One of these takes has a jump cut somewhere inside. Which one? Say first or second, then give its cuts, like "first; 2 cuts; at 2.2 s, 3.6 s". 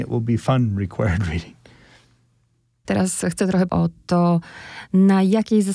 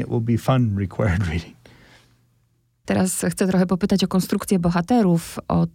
first; 1 cut; at 3.7 s